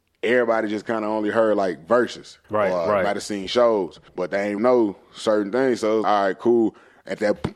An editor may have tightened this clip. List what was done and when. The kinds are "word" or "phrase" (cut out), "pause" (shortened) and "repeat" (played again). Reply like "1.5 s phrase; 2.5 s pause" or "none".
2.4 s pause; 4.1 s pause; 4.6 s word; 6.0 s word